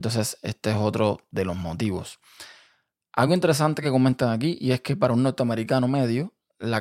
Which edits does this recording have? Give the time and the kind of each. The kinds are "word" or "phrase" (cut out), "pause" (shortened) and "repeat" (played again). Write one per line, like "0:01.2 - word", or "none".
none

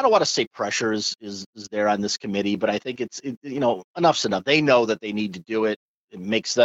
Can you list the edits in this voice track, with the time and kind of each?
none

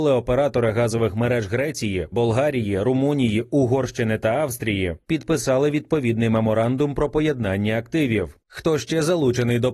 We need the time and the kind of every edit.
0:08.4 - pause

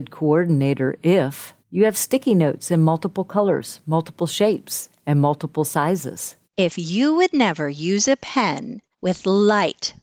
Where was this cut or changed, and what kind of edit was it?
0:01.6 - pause
0:06.4 - pause
0:08.9 - pause

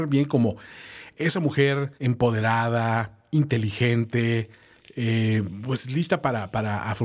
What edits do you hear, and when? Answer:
0:02.0 - pause

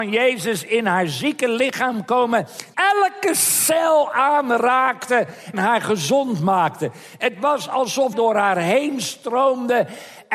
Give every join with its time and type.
0:02.7 - word
0:05.5 - word
0:08.1 - phrase

